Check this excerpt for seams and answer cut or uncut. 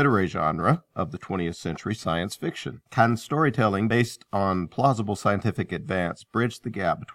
cut